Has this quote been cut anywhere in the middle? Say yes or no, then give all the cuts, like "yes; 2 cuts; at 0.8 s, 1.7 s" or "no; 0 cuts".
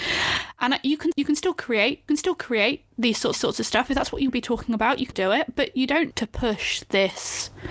yes; 6 cuts; at 1.1 s, 2.1 s, 3.3 s, 4.3 s, 5.1 s, 6.1 s